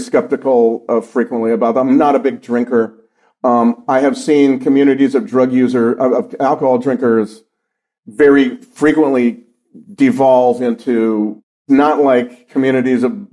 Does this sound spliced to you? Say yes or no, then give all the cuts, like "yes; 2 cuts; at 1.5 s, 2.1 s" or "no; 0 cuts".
no; 0 cuts